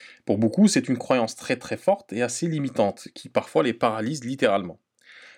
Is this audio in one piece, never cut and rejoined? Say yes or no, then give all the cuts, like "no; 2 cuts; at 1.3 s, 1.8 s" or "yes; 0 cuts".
yes; 0 cuts